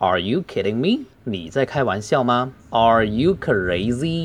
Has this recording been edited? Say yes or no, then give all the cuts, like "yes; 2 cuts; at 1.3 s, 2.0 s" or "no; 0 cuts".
yes; 2 cuts; at 1.1 s, 2.6 s